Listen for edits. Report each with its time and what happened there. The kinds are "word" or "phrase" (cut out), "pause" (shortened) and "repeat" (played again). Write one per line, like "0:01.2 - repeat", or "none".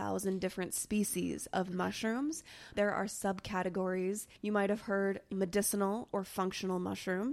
0:02.7 - phrase
0:04.4 - pause
0:05.3 - word